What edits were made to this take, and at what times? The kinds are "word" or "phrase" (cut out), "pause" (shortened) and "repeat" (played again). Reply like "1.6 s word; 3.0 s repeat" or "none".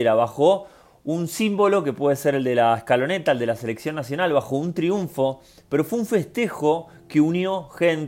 none